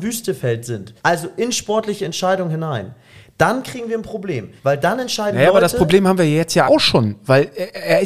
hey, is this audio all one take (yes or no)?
no